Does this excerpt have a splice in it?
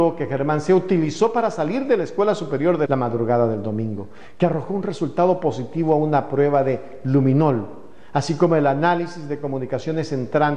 yes; 1 cut; at 2.9 s

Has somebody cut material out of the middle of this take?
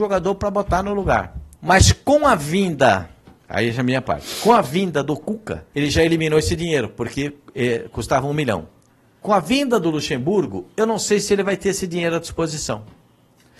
yes; 4 cuts; at 1.5 s, 3.4 s, 5.7 s, 8.9 s

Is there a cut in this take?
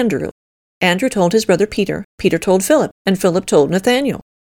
yes; 1 cut; at 2.1 s

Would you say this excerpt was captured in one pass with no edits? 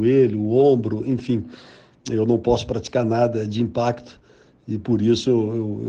yes; 0 cuts

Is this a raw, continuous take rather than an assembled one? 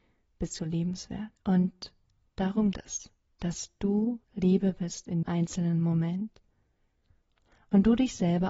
no; 4 cuts; at 1.4 s, 2.7 s, 4.2 s, 5.2 s

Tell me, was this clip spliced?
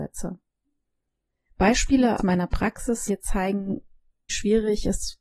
yes; 3 cuts; at 2.2 s, 3.1 s, 4.3 s

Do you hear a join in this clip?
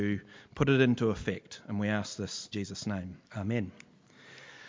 yes; 2 cuts; at 2.5 s, 3.2 s

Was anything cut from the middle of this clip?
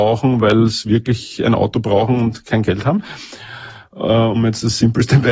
no; 0 cuts

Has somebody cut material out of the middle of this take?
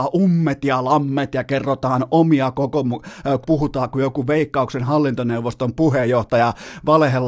yes; 1 cut; at 3.4 s

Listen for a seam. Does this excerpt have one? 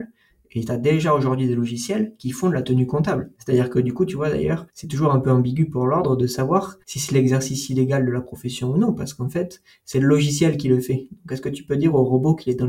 yes; 3 cuts; at 3.3 s, 4.7 s, 6.8 s

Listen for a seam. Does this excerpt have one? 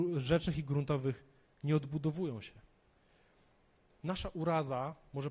no; 0 cuts

